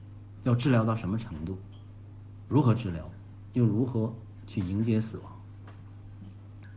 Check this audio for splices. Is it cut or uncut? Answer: uncut